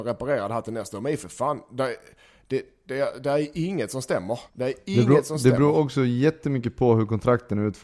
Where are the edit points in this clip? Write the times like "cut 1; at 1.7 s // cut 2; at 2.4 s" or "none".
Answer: cut 1; at 4.5 s